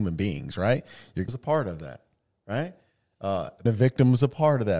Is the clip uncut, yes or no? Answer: no